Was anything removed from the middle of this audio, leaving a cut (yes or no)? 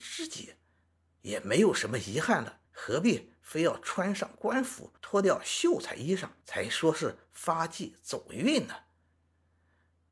yes